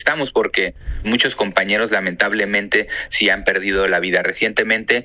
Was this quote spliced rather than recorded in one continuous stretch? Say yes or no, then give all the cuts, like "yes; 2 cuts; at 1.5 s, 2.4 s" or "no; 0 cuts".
yes; 1 cut; at 1.0 s